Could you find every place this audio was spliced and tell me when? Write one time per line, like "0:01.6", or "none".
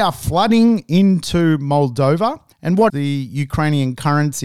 0:02.5
0:02.9